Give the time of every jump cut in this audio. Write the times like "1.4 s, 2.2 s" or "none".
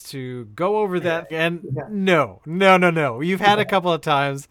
1.0 s, 1.3 s